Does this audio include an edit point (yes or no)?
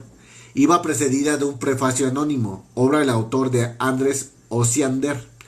no